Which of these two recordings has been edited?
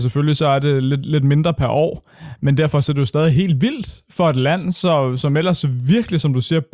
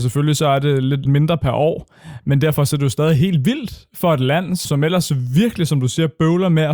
second; 2 cuts; at 1.1 s, 4.7 s

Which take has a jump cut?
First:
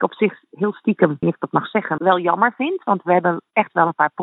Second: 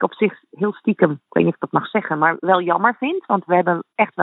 first; 2 cuts; at 1.2 s, 2.0 s

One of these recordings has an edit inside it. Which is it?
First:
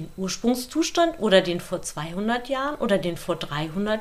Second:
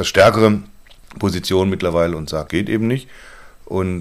second; 1 cut; at 2.5 s

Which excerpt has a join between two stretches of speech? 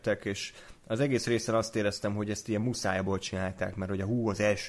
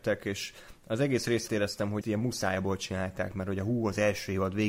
second; 2 cuts; at 1.5 s, 2.0 s

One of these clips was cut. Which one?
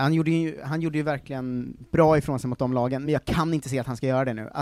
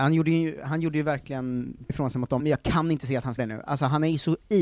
second; 3 cuts; at 1.9 s, 2.4 s, 3.4 s

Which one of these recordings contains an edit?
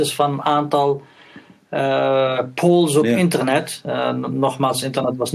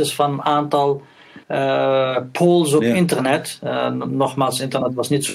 second; 1 cut; at 1.4 s

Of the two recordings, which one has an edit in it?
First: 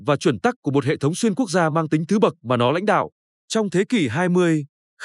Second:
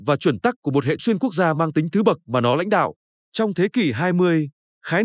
second; 1 cut; at 1.0 s

